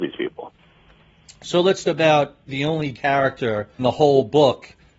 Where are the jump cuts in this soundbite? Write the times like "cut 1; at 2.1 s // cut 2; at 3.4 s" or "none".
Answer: cut 1; at 1.8 s // cut 2; at 2.5 s // cut 3; at 2.9 s // cut 4; at 3.8 s